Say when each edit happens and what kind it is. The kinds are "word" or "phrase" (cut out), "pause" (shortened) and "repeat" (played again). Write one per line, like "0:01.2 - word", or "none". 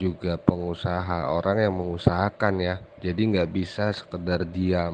none